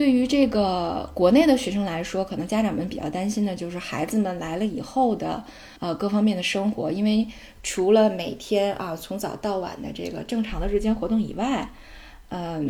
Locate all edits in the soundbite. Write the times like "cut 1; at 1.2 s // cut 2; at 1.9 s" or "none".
cut 1; at 5.8 s

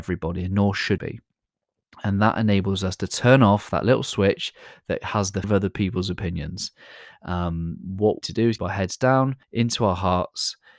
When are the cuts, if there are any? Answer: cut 1; at 1.0 s // cut 2; at 5.4 s // cut 3; at 8.2 s // cut 4; at 8.6 s // cut 5; at 9.4 s

